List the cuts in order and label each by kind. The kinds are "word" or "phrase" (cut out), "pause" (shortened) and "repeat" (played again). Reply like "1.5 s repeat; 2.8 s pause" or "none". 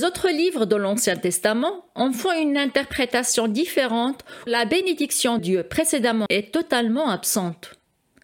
4.5 s word; 5.4 s word; 6.3 s word